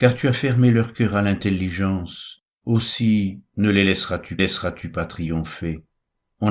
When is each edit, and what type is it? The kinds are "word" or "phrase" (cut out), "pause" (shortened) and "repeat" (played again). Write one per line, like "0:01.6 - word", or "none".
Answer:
0:02.5 - pause
0:04.4 - repeat